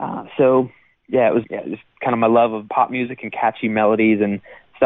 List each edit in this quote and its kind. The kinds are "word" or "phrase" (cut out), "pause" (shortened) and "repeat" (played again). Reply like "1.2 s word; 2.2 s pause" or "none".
1.4 s word; 2.7 s word